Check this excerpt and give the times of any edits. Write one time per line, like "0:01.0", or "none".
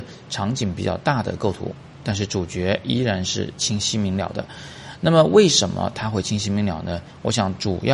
0:02.0